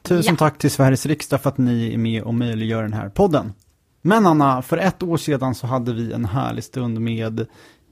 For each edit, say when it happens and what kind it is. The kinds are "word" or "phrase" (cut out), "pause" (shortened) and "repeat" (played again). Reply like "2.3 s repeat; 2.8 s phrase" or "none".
none